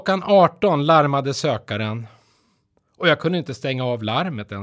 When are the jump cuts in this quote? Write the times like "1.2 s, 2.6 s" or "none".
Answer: none